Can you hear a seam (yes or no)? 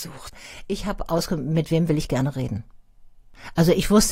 no